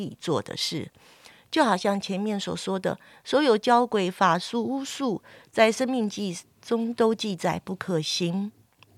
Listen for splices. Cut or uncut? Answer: uncut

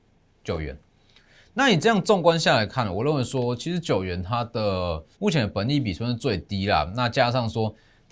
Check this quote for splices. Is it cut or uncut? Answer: cut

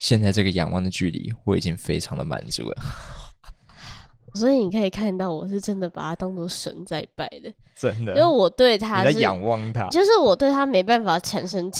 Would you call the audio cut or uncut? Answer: cut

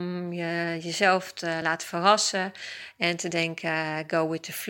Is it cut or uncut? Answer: uncut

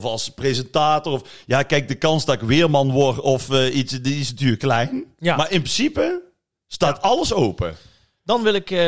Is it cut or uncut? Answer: uncut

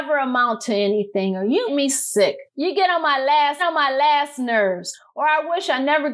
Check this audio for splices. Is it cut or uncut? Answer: cut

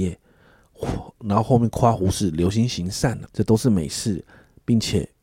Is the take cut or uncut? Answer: cut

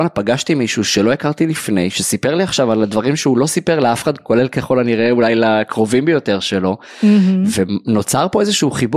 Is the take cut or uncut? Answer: uncut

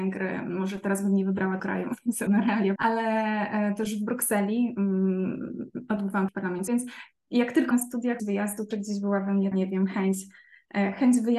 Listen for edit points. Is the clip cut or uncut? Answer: cut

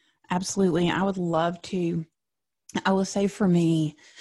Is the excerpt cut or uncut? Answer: uncut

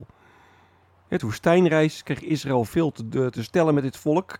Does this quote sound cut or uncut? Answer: cut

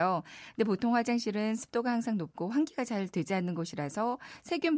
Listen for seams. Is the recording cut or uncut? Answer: uncut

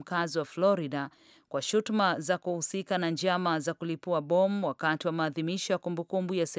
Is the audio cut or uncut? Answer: uncut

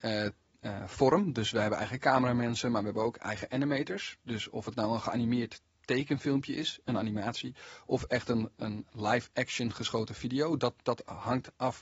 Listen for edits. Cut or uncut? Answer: uncut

